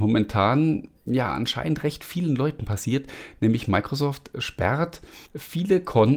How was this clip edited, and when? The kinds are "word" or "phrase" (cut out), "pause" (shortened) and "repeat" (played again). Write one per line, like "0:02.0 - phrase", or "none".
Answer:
0:05.3 - pause

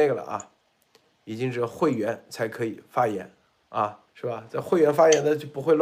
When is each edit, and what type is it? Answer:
0:04.1 - pause

